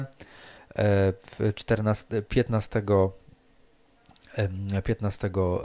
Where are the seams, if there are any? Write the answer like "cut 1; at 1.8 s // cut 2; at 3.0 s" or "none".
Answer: none